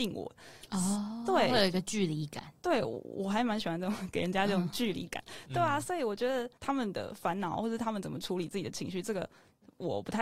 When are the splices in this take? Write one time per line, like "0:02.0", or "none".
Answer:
0:06.6